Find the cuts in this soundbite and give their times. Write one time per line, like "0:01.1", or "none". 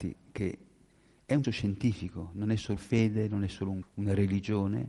0:01.4
0:02.8
0:03.8

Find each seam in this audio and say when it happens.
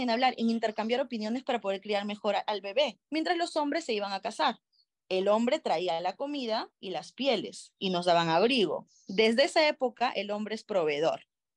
0:03.0
0:04.9

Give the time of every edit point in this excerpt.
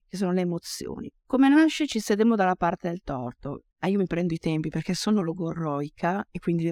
0:03.7

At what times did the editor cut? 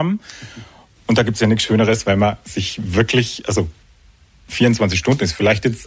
none

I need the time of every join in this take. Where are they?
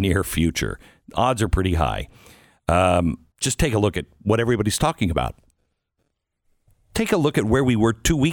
0:03.3

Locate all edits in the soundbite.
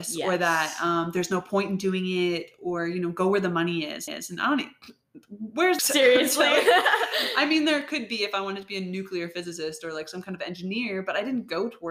0:04.1
0:05.8

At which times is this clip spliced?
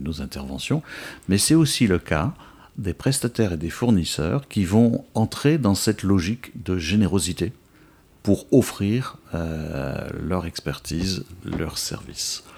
none

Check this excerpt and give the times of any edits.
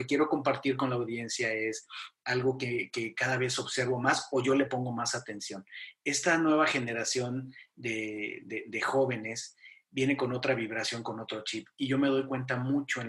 none

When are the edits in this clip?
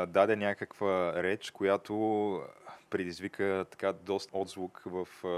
0:04.3

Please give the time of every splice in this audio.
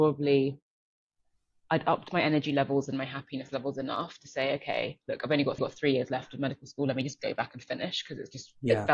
0:05.6

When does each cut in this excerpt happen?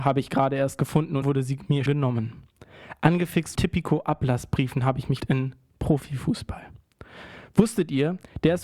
0:01.2
0:01.9
0:03.5
0:05.2

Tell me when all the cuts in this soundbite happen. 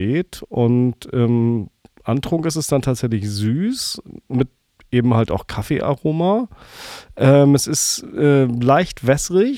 none

